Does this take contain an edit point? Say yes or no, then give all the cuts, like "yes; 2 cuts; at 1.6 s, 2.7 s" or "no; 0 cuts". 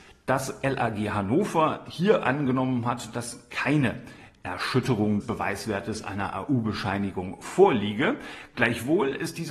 yes; 1 cut; at 5.2 s